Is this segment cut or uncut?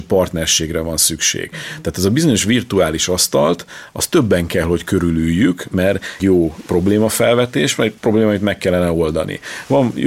cut